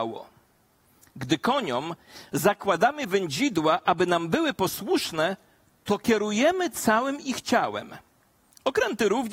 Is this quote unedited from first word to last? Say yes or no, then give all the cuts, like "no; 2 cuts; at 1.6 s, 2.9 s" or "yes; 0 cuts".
yes; 0 cuts